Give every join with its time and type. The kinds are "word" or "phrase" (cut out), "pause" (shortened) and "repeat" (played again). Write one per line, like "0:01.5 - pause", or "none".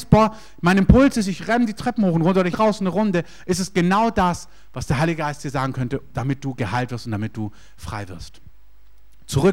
0:02.5 - phrase